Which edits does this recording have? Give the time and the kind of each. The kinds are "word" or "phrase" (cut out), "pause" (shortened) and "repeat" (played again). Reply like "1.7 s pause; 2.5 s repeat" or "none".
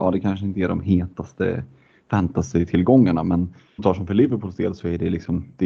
3.8 s word